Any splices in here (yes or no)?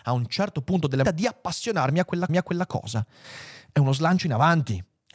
yes